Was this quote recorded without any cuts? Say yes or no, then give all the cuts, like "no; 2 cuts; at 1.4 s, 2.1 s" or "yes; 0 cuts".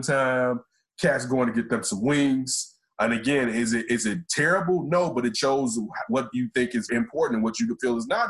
no; 2 cuts; at 5.3 s, 6.9 s